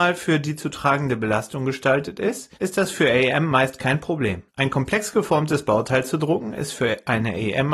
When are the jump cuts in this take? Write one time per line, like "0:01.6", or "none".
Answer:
0:02.6
0:04.5